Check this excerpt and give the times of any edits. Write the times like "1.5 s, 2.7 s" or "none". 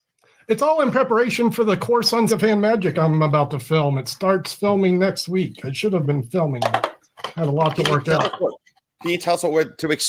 2.3 s, 6.0 s